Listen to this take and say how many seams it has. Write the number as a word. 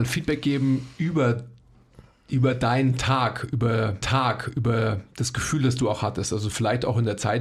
one